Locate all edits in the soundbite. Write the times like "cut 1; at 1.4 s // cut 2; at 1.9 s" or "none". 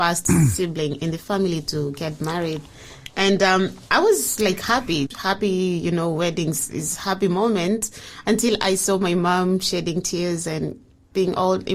cut 1; at 5.1 s